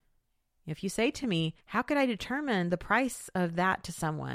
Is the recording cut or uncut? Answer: cut